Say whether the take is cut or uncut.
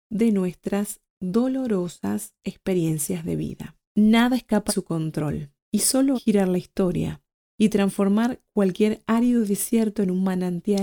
cut